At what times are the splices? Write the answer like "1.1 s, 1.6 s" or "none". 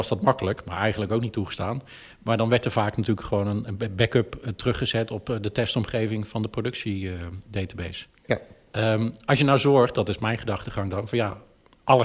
none